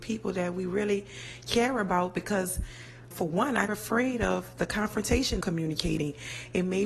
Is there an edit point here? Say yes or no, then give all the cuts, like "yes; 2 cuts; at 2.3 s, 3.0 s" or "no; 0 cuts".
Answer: yes; 3 cuts; at 3.1 s, 3.7 s, 5.4 s